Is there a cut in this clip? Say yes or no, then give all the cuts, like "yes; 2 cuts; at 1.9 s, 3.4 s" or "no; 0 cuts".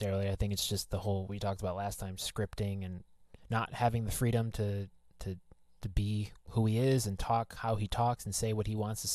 yes; 2 cuts; at 1.3 s, 3.4 s